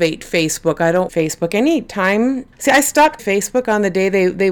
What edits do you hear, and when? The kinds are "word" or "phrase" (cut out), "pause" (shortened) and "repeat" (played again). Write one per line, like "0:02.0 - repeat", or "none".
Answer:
0:01.1 - phrase
0:02.5 - pause
0:03.2 - word